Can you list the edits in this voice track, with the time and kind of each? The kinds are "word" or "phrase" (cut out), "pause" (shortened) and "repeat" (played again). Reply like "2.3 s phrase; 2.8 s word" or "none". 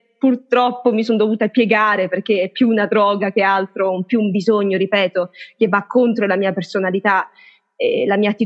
none